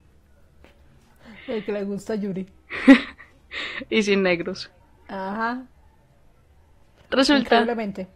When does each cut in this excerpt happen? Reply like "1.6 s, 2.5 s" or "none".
4.8 s